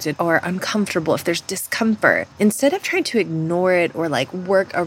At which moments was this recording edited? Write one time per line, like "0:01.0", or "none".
0:02.3